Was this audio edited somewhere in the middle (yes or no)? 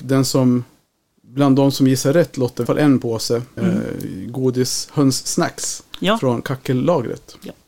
yes